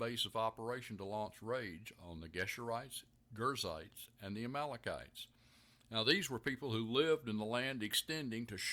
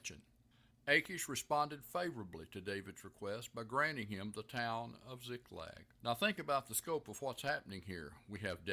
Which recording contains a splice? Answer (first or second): second